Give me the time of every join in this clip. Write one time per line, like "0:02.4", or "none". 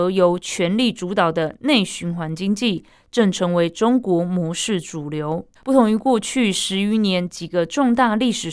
0:05.5